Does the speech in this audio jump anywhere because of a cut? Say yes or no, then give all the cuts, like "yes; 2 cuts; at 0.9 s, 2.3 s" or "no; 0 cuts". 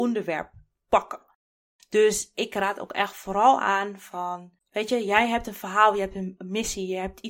yes; 1 cut; at 4.6 s